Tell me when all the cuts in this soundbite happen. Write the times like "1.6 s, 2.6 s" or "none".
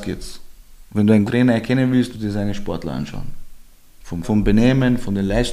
1.3 s, 2.1 s, 4.2 s